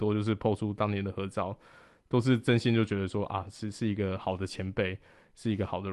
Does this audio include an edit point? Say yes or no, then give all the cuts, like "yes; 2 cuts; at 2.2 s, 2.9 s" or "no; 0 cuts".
no; 0 cuts